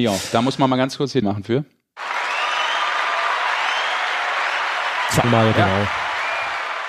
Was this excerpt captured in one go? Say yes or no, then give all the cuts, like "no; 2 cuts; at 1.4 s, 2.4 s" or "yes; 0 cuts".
no; 2 cuts; at 1.2 s, 5.2 s